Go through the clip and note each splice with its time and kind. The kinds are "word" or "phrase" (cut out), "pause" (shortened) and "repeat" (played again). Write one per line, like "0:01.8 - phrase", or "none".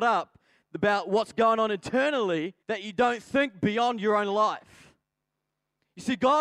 0:02.6 - pause

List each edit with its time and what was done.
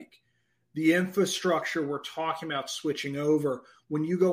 none

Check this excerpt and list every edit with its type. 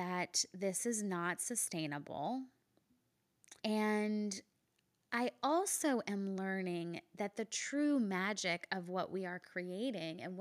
0:03.6 - pause

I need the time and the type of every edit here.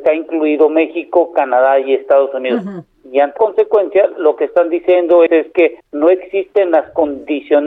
0:03.4 - word
0:05.3 - word
0:05.8 - pause

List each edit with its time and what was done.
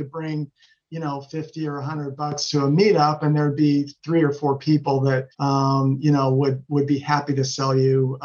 0:05.3 - pause

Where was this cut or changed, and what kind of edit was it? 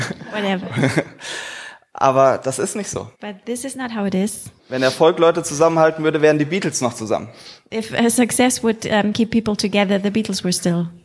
0:03.1 - pause
0:04.6 - pause

